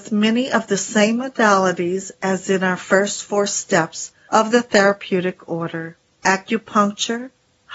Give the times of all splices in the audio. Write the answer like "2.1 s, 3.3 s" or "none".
none